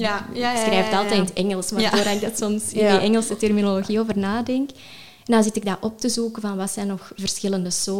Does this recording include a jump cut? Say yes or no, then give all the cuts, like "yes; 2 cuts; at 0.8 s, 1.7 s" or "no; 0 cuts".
no; 0 cuts